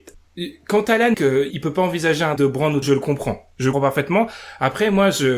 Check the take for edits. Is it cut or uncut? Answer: cut